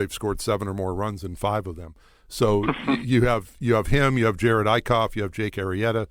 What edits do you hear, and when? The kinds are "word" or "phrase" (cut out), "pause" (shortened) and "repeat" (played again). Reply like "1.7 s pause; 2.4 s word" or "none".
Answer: none